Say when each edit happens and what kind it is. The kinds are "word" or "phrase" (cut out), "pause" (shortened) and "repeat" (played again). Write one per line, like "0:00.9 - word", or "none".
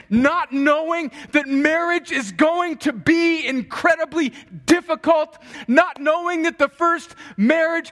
none